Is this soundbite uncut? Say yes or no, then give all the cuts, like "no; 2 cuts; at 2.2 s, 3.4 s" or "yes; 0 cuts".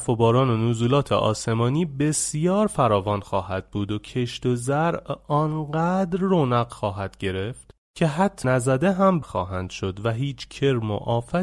no; 2 cuts; at 8.4 s, 9.2 s